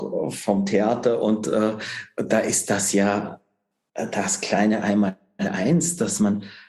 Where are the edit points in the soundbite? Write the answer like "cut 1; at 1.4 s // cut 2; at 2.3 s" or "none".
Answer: none